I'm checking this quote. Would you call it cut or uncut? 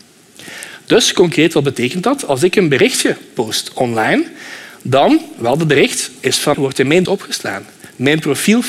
cut